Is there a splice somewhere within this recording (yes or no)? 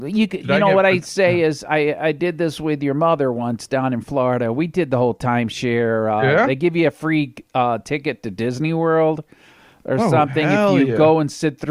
no